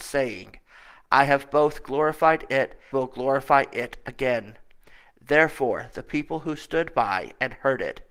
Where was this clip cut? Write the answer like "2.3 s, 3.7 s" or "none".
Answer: 2.9 s